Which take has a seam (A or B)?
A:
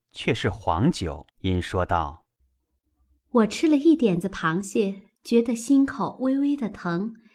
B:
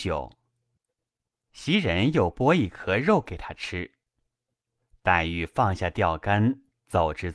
A